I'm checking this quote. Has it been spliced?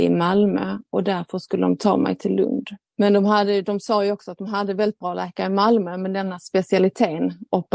yes; 1 cut; at 2.8 s

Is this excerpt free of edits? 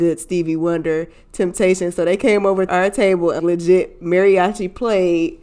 no; 2 cuts; at 2.7 s, 3.4 s

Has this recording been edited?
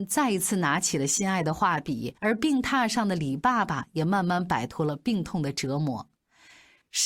yes; 1 cut; at 2.2 s

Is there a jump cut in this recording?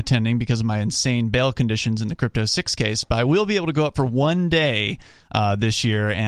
no; 0 cuts

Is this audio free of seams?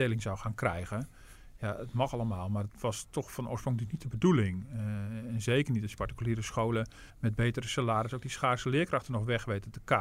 no; 2 cuts; at 2.7 s, 7.1 s

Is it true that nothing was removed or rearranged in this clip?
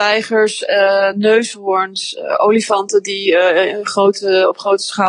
yes; 0 cuts

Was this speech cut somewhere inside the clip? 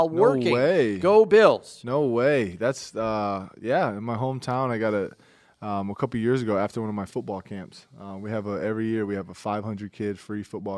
no; 0 cuts

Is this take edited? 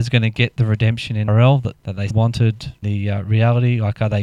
yes; 4 cuts; at 1.3 s, 1.7 s, 2.1 s, 2.8 s

